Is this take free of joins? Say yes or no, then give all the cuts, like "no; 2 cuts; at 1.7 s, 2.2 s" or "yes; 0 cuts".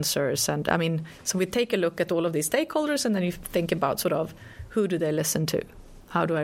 yes; 0 cuts